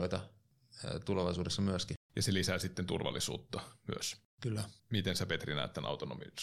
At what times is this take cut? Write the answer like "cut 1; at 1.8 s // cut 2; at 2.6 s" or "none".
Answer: cut 1; at 2.0 s // cut 2; at 4.8 s

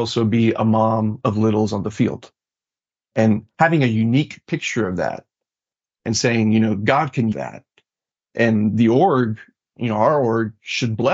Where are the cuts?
cut 1; at 7.3 s

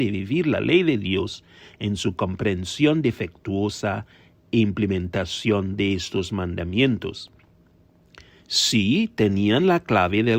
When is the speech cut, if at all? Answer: none

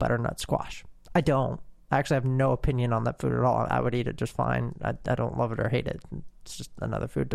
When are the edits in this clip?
none

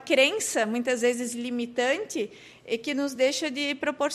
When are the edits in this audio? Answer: none

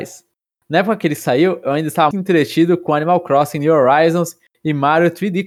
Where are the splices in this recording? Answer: cut 1; at 2.1 s

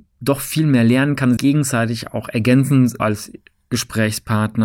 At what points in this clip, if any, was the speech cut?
cut 1; at 1.4 s // cut 2; at 3.0 s

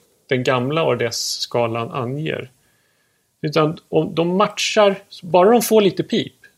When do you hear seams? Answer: none

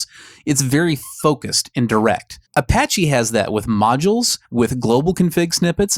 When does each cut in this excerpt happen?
cut 1; at 2.4 s // cut 2; at 4.4 s

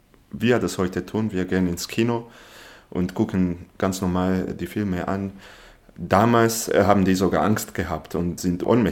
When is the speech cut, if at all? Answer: none

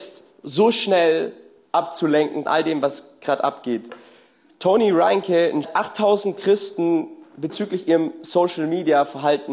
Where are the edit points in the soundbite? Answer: cut 1; at 2.5 s // cut 2; at 5.6 s

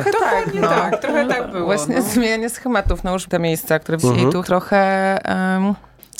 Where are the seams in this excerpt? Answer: cut 1; at 3.3 s // cut 2; at 4.0 s // cut 3; at 4.4 s

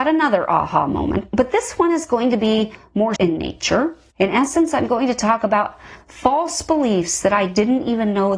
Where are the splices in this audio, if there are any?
cut 1; at 3.2 s // cut 2; at 4.1 s

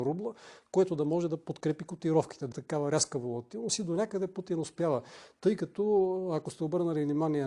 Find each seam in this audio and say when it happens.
cut 1; at 2.5 s

